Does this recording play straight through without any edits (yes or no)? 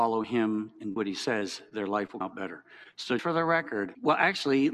no